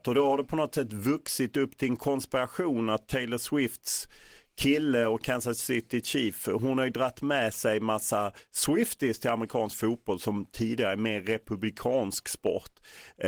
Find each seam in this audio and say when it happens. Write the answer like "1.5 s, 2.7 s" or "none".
none